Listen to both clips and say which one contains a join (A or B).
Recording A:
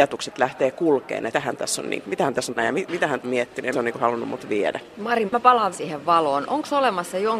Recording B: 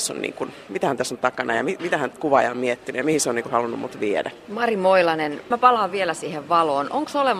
A